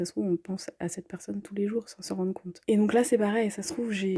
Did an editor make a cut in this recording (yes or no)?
no